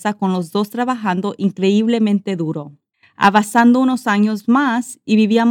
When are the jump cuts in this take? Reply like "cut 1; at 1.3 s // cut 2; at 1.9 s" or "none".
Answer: cut 1; at 2.9 s